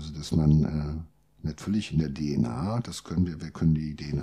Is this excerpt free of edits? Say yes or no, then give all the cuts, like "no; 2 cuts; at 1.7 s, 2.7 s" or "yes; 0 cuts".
yes; 0 cuts